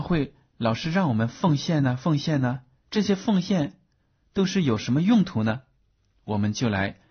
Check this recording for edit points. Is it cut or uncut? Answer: uncut